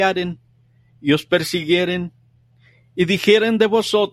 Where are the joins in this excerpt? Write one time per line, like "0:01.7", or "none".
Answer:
none